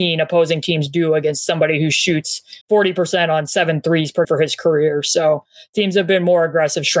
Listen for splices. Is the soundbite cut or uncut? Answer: cut